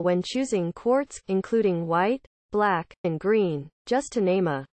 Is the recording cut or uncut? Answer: cut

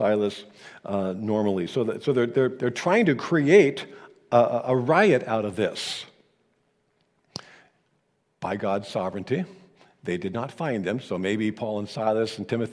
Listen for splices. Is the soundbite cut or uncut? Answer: uncut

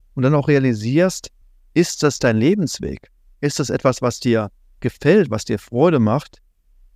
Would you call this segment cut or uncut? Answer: uncut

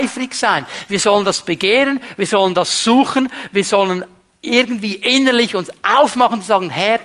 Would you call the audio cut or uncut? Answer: uncut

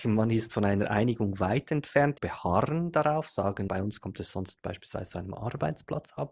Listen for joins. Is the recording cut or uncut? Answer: cut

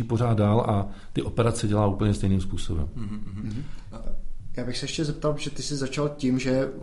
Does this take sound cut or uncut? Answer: uncut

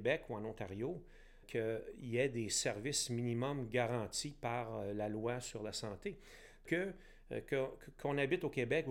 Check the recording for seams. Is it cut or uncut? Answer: cut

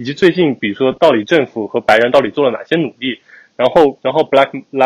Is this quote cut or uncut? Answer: uncut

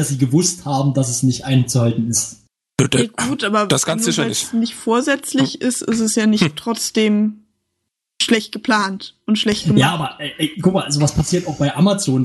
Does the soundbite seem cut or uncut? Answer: uncut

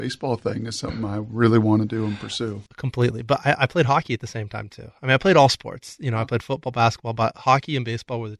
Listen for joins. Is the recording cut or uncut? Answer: cut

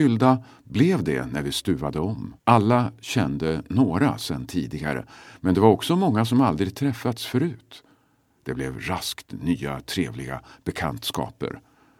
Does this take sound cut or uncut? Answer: cut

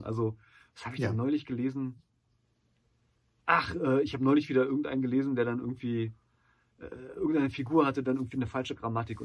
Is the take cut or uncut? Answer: uncut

